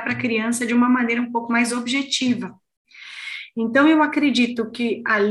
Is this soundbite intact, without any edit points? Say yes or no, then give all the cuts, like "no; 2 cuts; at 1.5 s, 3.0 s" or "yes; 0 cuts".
yes; 0 cuts